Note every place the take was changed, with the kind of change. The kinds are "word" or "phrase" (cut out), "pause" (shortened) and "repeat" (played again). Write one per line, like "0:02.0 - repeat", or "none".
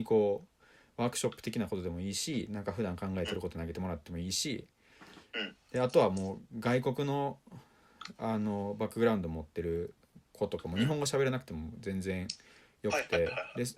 none